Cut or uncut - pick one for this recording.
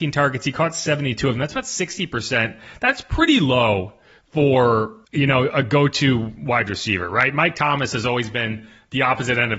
uncut